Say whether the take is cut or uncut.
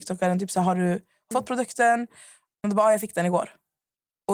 cut